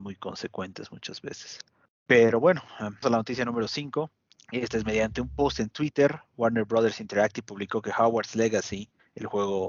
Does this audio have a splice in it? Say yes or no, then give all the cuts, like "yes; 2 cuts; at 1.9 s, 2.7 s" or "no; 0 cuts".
yes; 1 cut; at 3.0 s